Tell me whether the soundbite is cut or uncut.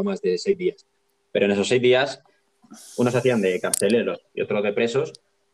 uncut